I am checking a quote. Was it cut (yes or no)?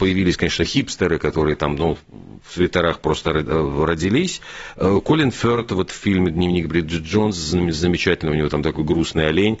no